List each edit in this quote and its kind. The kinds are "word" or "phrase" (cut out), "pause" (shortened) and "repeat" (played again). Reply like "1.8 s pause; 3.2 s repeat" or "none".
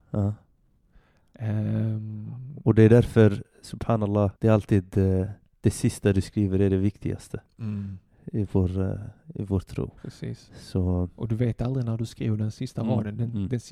4.4 s pause; 5.5 s pause; 10.0 s pause

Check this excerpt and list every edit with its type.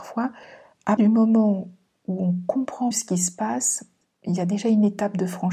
1.0 s word; 2.9 s word

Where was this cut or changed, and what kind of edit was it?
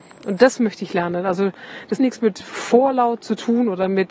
2.0 s word

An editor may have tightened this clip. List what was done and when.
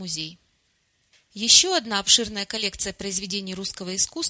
none

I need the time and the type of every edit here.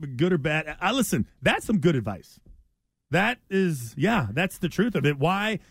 1.3 s pause

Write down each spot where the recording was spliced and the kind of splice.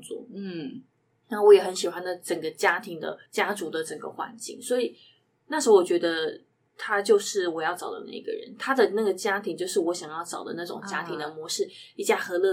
3.3 s pause

